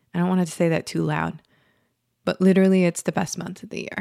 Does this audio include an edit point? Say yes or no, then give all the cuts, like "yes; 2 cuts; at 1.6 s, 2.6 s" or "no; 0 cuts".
no; 0 cuts